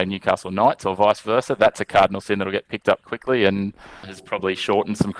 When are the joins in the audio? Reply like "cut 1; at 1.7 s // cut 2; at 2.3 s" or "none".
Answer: cut 1; at 3.0 s // cut 2; at 4.0 s